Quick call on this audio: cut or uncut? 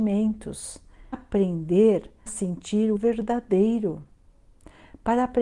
cut